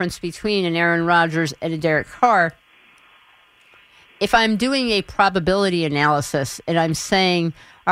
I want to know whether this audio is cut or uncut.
uncut